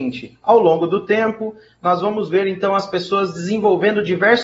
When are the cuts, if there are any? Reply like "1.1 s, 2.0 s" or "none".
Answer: none